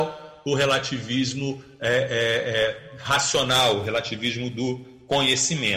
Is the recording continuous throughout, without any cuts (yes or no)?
yes